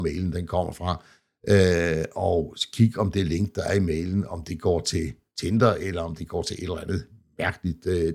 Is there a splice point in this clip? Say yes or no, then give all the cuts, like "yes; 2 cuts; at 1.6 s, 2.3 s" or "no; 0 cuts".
no; 0 cuts